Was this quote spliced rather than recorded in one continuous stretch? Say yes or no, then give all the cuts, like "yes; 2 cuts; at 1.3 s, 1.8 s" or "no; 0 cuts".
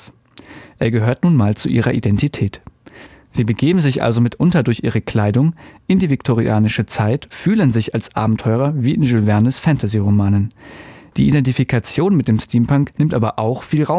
yes; 1 cut; at 7.3 s